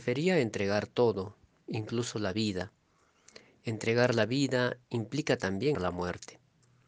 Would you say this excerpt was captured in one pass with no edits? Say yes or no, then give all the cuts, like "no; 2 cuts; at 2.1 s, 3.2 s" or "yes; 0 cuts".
no; 1 cut; at 5.7 s